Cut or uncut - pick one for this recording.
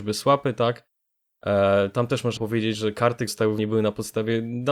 cut